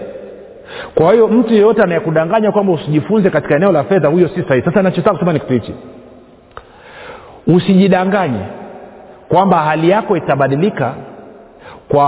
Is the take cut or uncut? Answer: uncut